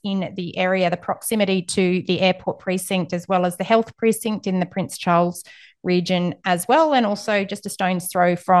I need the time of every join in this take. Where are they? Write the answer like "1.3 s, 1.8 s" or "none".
none